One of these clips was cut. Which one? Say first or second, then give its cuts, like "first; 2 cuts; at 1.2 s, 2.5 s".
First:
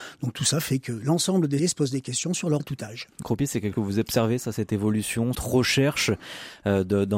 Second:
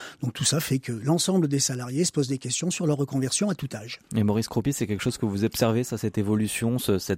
first; 5 cuts; at 1.6 s, 2.6 s, 3.2 s, 3.7 s, 5.3 s